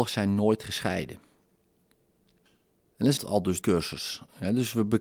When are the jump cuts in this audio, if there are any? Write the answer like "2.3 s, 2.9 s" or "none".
3.2 s, 3.6 s